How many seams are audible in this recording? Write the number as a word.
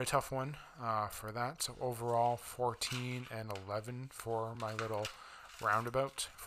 zero